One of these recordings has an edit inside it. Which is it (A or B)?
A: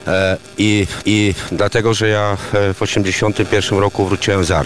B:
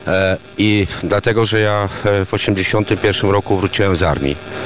A